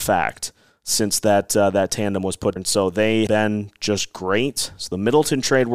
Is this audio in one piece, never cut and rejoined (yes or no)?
no